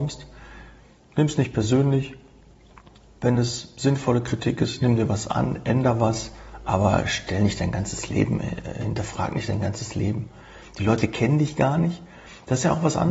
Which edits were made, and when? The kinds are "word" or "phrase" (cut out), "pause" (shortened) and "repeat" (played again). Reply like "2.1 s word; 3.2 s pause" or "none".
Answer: none